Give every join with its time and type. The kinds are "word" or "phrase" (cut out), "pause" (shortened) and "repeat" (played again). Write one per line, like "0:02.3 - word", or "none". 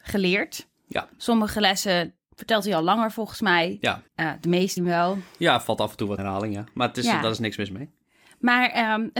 0:02.2 - pause
0:04.1 - pause
0:04.8 - word
0:06.2 - word